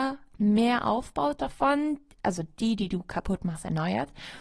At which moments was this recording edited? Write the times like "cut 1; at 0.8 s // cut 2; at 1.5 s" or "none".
none